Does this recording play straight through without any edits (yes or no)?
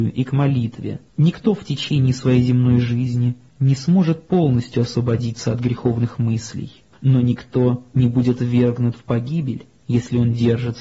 no